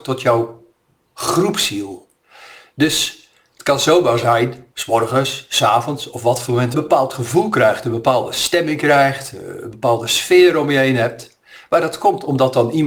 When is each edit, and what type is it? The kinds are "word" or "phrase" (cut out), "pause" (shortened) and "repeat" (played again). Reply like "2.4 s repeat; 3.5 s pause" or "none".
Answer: 4.7 s phrase; 6.7 s phrase

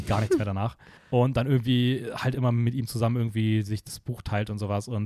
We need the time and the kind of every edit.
1.0 s pause

